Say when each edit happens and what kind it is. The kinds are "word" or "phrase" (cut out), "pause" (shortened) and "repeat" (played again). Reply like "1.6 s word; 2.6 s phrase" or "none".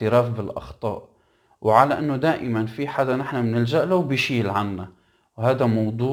none